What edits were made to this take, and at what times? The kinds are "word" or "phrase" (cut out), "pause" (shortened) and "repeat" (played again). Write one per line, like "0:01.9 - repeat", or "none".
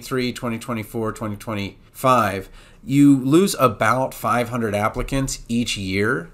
0:01.9 - pause